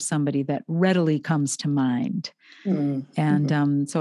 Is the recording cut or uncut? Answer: uncut